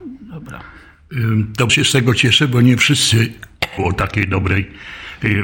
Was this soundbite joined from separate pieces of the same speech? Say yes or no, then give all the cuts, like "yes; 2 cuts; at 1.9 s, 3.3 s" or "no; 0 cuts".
yes; 2 cuts; at 1.7 s, 3.8 s